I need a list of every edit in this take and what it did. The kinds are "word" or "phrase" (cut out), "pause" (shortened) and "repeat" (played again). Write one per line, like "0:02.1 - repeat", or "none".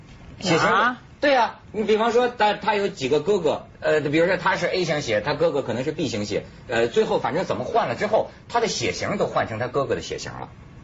0:01.6 - pause
0:03.7 - pause

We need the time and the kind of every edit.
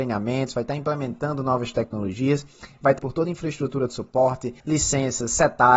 0:03.0 - word
0:04.6 - pause

